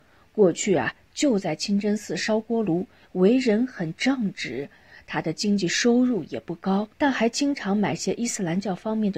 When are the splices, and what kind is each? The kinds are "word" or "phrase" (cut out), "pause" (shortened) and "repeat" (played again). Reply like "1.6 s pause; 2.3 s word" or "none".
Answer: 6.9 s pause